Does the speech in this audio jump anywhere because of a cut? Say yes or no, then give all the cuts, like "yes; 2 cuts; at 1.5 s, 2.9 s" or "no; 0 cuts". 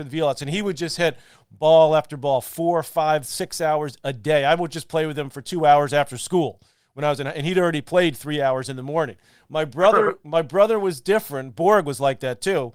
no; 0 cuts